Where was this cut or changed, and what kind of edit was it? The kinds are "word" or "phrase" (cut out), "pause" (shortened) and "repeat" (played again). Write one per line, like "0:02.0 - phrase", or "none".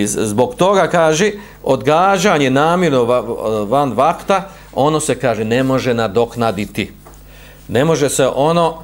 none